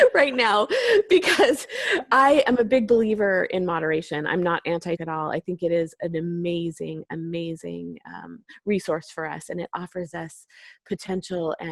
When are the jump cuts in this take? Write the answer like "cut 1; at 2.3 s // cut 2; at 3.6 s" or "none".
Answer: cut 1; at 5.0 s